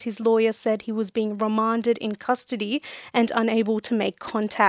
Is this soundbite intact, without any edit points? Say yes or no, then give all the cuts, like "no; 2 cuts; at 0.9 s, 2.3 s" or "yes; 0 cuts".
yes; 0 cuts